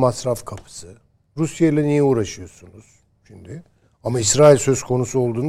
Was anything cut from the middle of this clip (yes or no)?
no